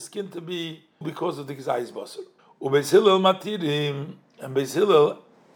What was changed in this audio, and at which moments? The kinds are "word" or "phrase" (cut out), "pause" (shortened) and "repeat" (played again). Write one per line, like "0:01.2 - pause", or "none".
0:01.0 - word
0:02.4 - pause